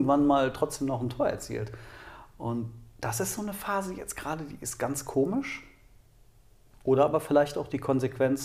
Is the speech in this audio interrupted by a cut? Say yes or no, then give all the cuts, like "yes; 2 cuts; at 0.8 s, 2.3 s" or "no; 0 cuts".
no; 0 cuts